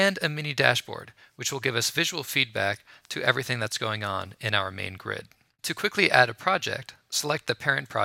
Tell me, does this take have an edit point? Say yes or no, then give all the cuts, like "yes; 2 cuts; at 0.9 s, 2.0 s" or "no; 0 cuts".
no; 0 cuts